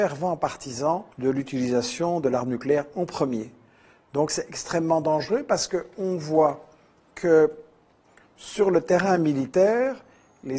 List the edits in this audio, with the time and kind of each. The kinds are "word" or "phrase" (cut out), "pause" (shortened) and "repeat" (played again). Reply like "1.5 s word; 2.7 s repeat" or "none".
1.1 s pause